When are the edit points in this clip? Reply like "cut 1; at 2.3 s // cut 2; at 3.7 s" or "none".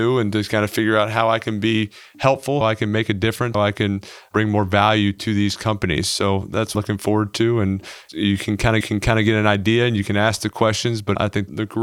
cut 1; at 2.6 s // cut 2; at 3.5 s // cut 3; at 6.7 s // cut 4; at 8.8 s

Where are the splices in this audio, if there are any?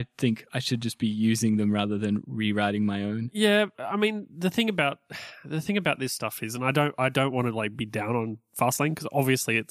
cut 1; at 3.7 s

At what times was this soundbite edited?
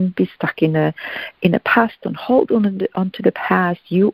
none

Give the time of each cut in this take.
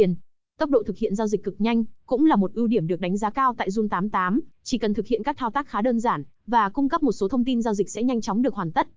cut 1; at 4.5 s

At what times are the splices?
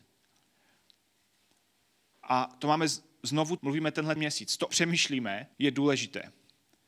cut 1; at 3.6 s // cut 2; at 4.2 s // cut 3; at 4.7 s // cut 4; at 5.5 s

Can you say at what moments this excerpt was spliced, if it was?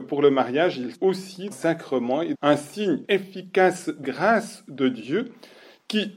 cut 1; at 0.9 s // cut 2; at 1.5 s // cut 3; at 2.3 s // cut 4; at 3.0 s // cut 5; at 4.0 s

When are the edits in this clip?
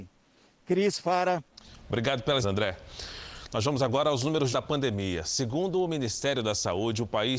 cut 1; at 2.4 s // cut 2; at 4.5 s

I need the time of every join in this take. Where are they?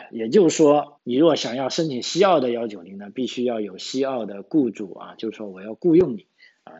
cut 1; at 1.0 s

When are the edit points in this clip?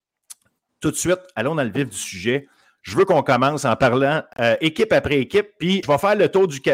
cut 1; at 5.8 s

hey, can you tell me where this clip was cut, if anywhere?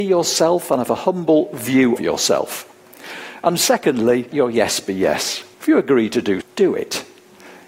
cut 1; at 2.0 s // cut 2; at 4.3 s // cut 3; at 5.5 s // cut 4; at 6.4 s

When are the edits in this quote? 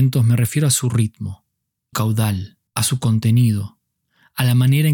cut 1; at 1.9 s // cut 2; at 2.7 s

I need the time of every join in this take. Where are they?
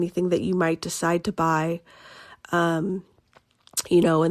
none

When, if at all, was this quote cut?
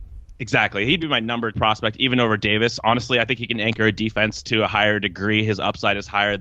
cut 1; at 1.0 s // cut 2; at 1.5 s

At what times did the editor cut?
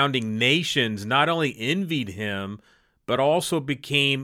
none

